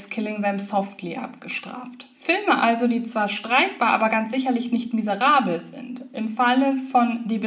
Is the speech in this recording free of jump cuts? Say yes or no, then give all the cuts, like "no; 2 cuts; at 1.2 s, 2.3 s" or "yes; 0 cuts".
no; 1 cut; at 2.1 s